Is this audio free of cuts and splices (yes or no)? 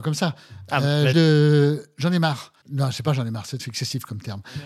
no